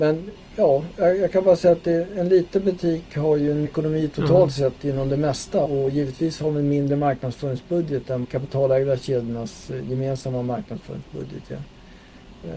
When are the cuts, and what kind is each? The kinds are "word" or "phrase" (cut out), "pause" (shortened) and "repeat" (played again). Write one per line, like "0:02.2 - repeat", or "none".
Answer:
0:03.7 - word
0:05.7 - word
0:08.2 - word